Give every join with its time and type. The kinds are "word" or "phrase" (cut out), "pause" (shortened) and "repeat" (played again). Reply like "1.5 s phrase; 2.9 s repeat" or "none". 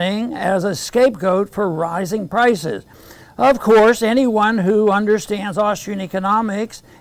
none